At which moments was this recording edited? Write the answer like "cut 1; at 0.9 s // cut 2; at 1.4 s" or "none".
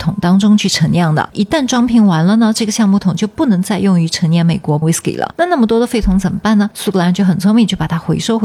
cut 1; at 4.8 s